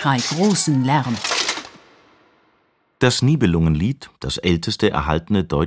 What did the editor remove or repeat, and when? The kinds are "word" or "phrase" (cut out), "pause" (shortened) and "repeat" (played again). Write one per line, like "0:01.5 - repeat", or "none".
none